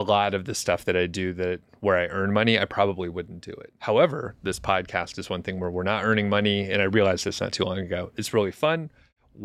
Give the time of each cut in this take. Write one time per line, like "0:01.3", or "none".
0:03.8